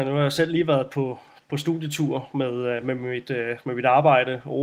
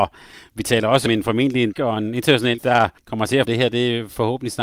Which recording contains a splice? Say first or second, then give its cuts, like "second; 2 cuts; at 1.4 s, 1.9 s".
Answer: second; 5 cuts; at 1.1 s, 1.7 s, 2.6 s, 3.0 s, 3.4 s